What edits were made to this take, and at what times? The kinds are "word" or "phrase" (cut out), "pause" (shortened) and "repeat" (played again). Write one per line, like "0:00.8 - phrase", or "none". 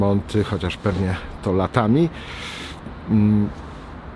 0:01.4 - word